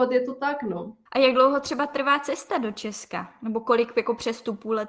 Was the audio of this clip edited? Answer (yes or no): yes